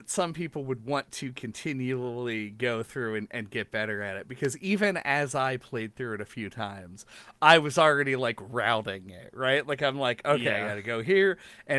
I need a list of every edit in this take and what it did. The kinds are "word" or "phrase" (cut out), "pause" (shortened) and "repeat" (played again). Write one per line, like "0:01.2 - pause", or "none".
none